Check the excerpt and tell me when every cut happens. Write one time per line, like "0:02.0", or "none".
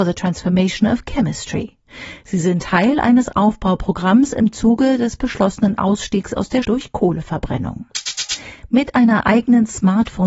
0:06.6